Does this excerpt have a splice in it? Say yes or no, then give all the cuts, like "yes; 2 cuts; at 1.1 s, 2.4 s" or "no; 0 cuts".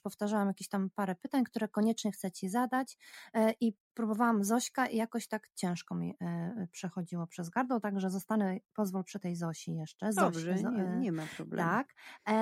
no; 0 cuts